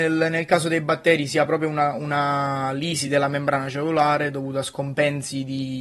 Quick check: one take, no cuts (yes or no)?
yes